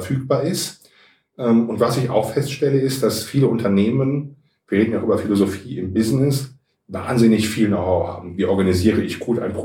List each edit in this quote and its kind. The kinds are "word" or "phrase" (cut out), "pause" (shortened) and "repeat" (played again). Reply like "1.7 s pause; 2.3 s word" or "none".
none